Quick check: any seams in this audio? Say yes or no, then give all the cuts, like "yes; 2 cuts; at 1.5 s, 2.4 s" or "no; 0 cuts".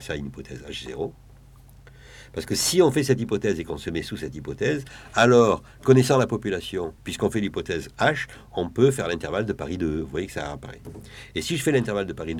yes; 1 cut; at 7.0 s